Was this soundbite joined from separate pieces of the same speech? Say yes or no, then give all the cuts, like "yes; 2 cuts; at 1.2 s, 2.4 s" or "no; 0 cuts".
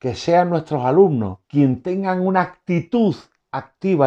yes; 1 cut; at 1.4 s